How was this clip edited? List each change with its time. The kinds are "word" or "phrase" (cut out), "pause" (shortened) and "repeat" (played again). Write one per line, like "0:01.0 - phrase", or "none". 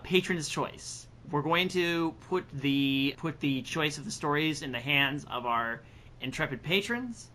0:01.2 - pause
0:03.1 - word

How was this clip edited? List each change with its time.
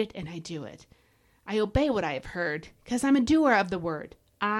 none

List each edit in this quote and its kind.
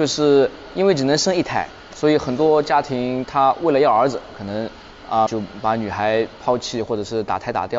0:05.3 - word

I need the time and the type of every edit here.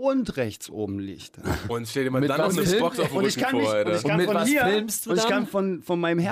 none

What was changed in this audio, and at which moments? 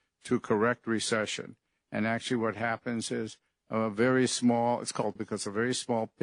0:05.2 - word

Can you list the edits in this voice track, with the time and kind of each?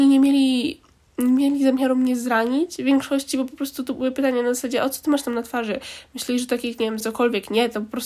0:07.0 - word

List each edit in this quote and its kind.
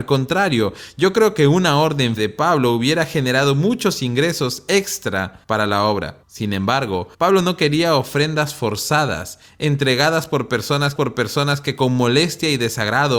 0:02.2 - word
0:05.4 - pause
0:06.2 - pause
0:07.1 - pause
0:11.0 - repeat

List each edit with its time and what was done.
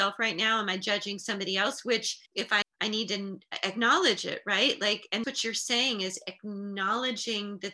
0:02.3 - pause
0:02.6 - word
0:05.2 - word

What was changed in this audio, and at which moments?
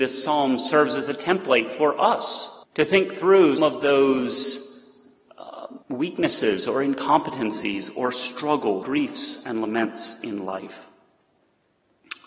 0:02.6 - pause
0:03.6 - word
0:05.8 - pause
0:08.8 - word

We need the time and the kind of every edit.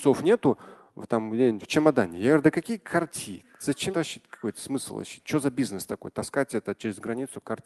0:03.9 - word

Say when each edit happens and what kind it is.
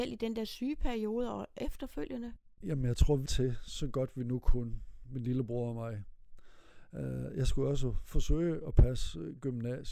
0:02.5 - pause
0:03.3 - phrase

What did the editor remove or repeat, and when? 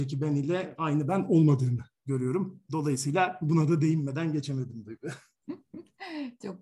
none

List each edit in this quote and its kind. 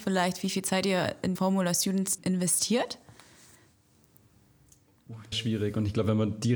0:01.4 - word
0:02.2 - word
0:05.3 - word

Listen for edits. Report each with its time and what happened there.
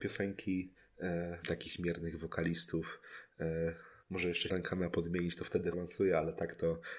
0:01.4 - phrase
0:04.0 - word
0:04.5 - phrase
0:05.7 - word

